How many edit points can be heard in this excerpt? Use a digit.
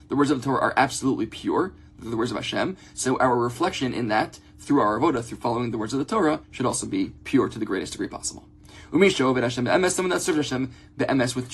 2